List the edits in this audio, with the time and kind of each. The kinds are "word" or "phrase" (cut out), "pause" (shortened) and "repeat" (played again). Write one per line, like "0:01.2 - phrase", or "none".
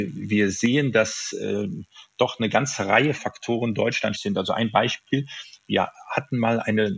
0:03.1 - word
0:04.1 - word